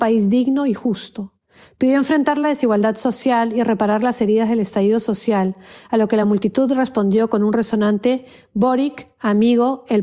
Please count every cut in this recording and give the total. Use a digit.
0